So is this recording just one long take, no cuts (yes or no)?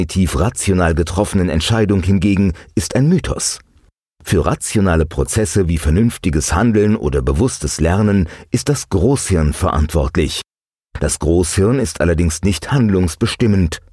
yes